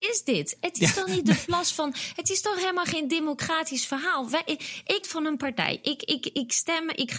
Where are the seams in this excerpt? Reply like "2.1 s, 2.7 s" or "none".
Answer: 5.0 s

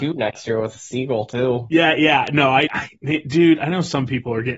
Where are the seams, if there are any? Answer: 2.7 s

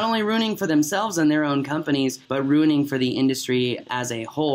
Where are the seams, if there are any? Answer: 2.2 s

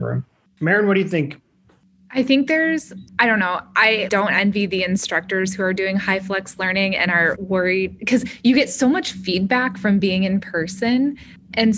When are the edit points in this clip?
3.1 s, 4.1 s, 7.4 s

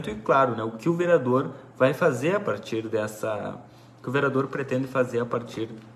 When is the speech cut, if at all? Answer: none

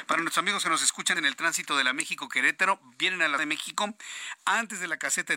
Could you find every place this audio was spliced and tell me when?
1.2 s, 3.4 s

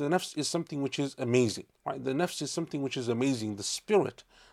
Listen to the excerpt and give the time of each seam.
1.7 s

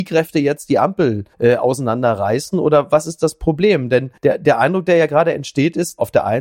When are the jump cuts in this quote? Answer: 1.3 s, 4.2 s

